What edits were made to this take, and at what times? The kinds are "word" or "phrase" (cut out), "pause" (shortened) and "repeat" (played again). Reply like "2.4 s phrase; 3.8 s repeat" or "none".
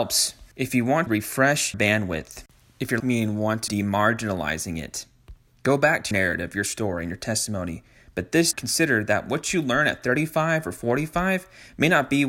1.1 s word; 1.7 s word; 3.0 s word; 3.7 s word; 6.1 s word; 8.5 s word